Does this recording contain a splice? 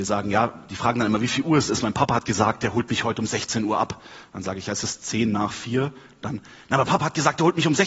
no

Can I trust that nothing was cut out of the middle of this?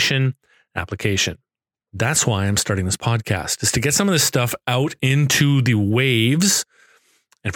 yes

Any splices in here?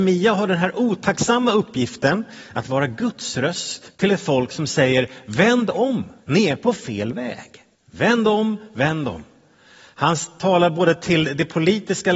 yes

